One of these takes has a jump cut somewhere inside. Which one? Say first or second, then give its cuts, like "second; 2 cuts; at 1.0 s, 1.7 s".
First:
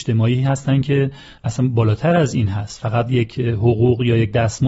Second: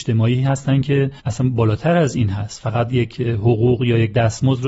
second; 1 cut; at 1.2 s